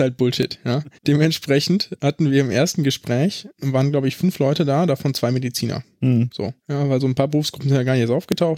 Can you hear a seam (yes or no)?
yes